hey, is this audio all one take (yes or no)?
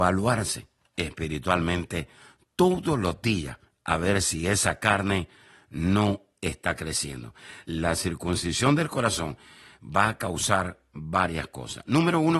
yes